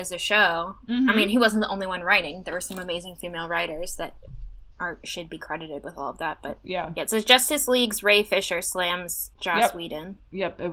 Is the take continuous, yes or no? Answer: no